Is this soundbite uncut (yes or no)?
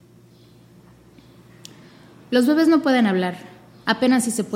yes